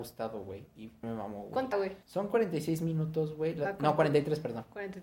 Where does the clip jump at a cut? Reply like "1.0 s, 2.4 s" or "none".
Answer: 1.0 s, 1.7 s, 2.0 s